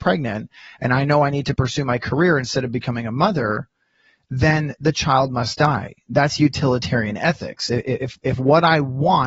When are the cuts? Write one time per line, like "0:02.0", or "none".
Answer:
none